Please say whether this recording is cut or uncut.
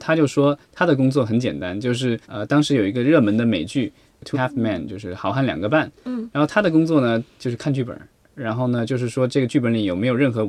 cut